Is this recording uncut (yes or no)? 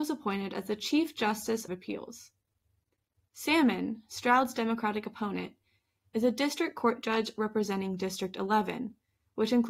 no